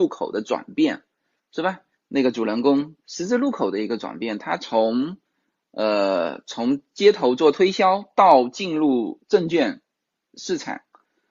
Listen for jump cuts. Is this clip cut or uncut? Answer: uncut